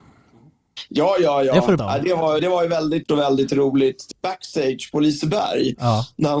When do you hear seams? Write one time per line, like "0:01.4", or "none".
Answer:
0:01.8
0:02.4
0:03.0
0:04.1